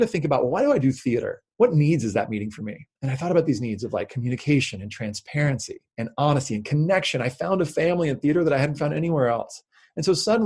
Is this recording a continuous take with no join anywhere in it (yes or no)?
no